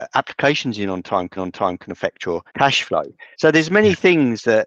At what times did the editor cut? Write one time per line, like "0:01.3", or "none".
0:01.4
0:02.5
0:03.3